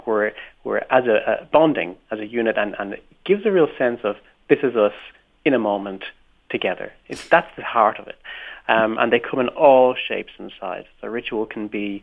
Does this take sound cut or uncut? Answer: uncut